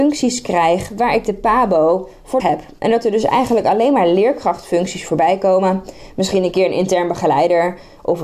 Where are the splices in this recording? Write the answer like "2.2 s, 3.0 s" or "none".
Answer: 2.4 s